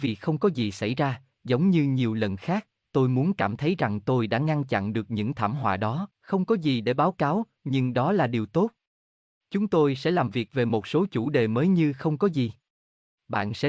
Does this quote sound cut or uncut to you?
cut